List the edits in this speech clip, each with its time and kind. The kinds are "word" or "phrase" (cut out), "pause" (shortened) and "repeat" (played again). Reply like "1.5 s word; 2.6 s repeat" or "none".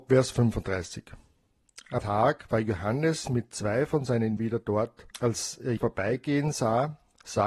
2.0 s word; 4.4 s word; 5.1 s pause; 5.8 s word